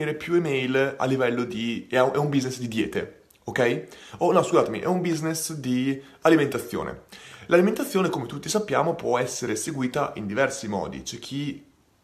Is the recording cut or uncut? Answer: uncut